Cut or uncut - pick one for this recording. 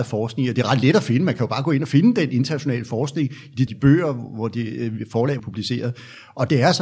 cut